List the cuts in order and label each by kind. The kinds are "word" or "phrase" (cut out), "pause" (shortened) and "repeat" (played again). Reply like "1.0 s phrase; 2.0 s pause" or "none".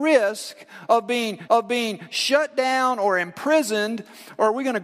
1.5 s repeat